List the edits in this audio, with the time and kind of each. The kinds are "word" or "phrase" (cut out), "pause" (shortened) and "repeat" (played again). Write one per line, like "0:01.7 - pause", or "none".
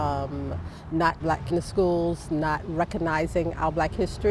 0:01.2 - word
0:01.5 - phrase